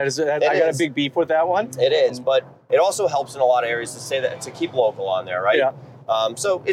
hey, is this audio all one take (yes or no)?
no